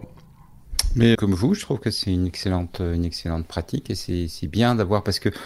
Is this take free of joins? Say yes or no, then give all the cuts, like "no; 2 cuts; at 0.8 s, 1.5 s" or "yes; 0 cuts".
no; 1 cut; at 1.1 s